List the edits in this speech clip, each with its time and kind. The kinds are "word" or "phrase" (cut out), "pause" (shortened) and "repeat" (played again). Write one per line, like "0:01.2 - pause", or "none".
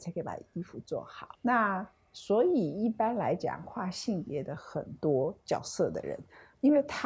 0:01.3 - pause